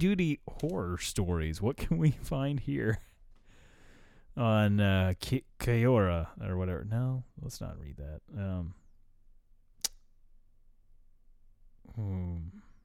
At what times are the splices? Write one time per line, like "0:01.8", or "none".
0:05.5

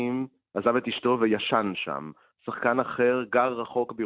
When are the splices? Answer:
none

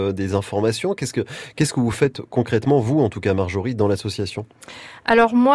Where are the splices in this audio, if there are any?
none

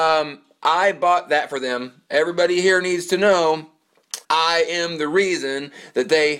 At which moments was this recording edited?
0:04.2

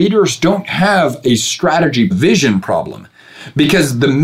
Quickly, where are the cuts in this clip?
0:02.1

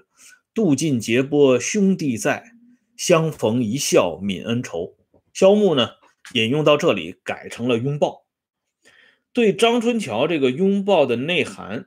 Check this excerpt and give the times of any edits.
none

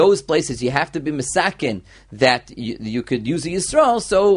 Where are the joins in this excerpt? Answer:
none

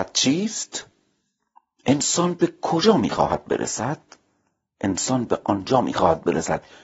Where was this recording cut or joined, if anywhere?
none

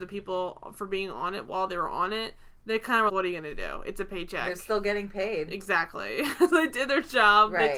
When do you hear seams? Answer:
0:03.1
0:06.5

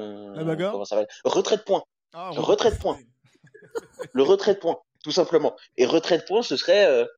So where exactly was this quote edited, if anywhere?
none

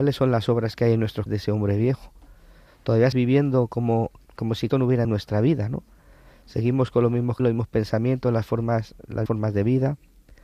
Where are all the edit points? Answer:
0:01.3
0:03.1
0:04.2
0:04.7
0:05.0
0:07.4
0:09.3

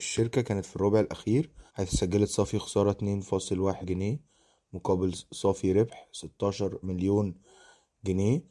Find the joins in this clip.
0:01.7
0:03.8
0:06.8

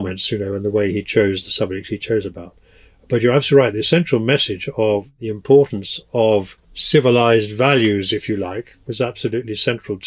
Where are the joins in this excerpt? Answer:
0:06.6

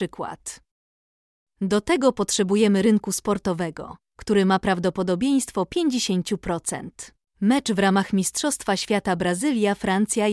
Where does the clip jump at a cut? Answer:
0:07.3

